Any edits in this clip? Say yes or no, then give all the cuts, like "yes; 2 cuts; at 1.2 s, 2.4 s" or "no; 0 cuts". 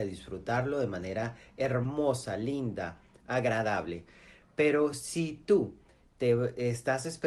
no; 0 cuts